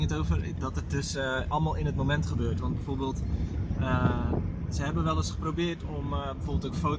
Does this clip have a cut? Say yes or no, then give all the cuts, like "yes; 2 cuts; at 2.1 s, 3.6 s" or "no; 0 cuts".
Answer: no; 0 cuts